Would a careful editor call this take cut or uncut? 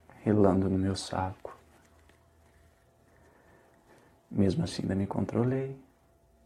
uncut